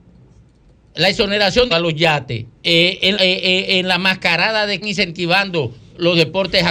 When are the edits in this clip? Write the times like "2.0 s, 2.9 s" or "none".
1.7 s, 2.6 s, 3.1 s, 4.8 s